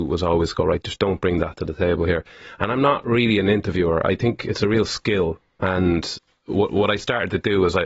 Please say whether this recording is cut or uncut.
uncut